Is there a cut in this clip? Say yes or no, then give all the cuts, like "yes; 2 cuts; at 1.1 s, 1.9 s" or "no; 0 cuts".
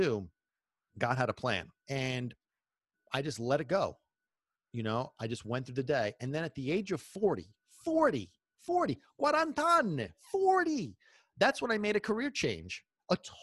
yes; 1 cut; at 1.8 s